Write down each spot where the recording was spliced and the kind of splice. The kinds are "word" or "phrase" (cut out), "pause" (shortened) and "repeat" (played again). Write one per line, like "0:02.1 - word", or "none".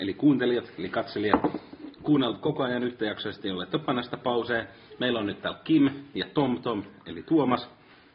none